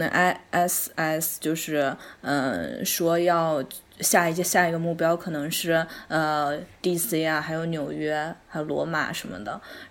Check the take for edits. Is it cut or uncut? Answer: uncut